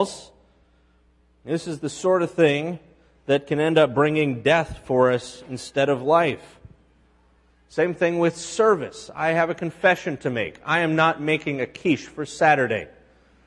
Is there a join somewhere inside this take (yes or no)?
no